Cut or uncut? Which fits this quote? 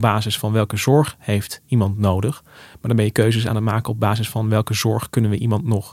uncut